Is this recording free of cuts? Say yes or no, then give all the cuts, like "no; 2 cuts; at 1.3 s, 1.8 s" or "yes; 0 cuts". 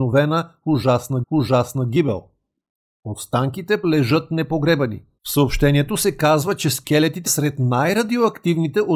no; 4 cuts; at 1.2 s, 3.8 s, 5.2 s, 7.3 s